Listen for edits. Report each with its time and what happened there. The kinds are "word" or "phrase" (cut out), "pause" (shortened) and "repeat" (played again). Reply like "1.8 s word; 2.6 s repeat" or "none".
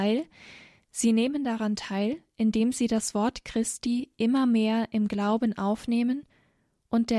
none